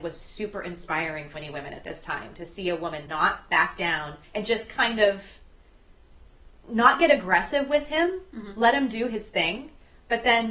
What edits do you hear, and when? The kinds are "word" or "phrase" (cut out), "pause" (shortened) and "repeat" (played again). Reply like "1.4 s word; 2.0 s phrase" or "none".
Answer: 1.3 s word; 3.1 s word; 4.2 s pause